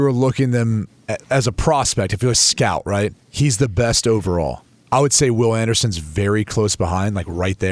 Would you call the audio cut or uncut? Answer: cut